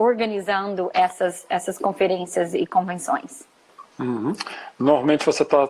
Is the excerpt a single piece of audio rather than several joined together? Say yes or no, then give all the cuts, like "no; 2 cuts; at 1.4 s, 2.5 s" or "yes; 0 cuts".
yes; 0 cuts